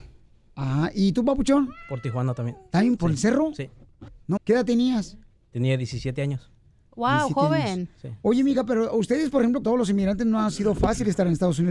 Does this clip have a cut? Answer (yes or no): yes